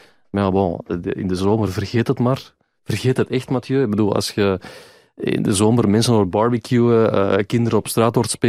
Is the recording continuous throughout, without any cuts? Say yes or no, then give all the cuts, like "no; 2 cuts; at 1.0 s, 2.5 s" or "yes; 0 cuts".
yes; 0 cuts